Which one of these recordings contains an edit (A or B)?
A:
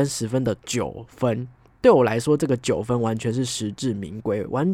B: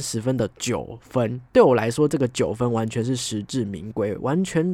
B